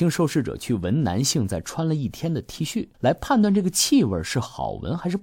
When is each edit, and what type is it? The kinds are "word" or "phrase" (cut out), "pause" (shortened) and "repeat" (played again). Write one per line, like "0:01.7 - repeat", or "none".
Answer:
0:02.9 - pause